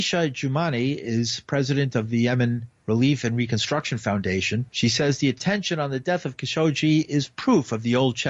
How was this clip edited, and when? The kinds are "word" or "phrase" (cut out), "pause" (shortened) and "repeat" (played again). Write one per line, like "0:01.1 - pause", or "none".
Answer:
0:04.7 - pause

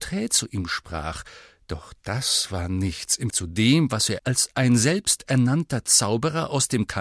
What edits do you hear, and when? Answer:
0:03.3 - word
0:04.2 - word

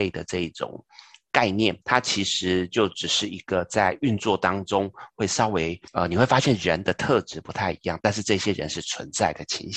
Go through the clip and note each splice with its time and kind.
0:01.8 - pause
0:05.9 - pause

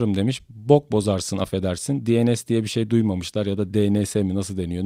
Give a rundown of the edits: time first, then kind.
none

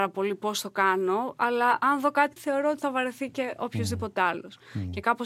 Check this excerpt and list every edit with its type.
0:02.4 - word

